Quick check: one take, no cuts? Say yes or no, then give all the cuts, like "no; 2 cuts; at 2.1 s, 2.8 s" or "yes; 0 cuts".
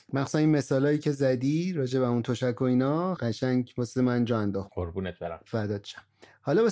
no; 2 cuts; at 3.2 s, 4.7 s